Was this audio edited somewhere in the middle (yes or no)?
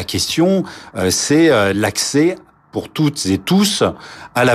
no